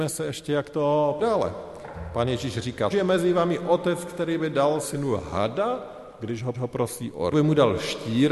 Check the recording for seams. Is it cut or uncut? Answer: cut